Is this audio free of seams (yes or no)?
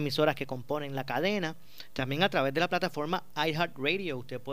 yes